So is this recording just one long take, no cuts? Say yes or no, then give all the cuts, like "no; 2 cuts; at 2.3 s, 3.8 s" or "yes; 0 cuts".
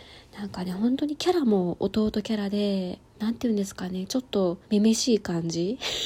no; 2 cuts; at 3.1 s, 4.6 s